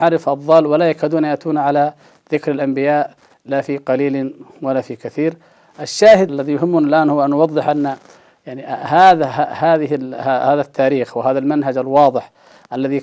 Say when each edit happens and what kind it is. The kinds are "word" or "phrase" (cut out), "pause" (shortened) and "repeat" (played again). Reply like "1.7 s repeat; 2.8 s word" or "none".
6.3 s word

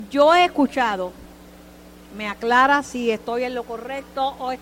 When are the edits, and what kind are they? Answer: none

